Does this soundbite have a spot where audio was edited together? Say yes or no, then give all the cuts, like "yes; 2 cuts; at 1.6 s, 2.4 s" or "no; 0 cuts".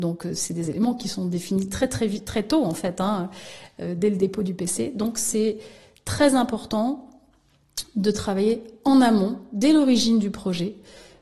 no; 0 cuts